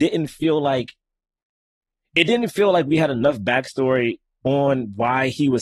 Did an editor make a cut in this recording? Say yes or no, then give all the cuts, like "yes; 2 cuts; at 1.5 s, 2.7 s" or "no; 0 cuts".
no; 0 cuts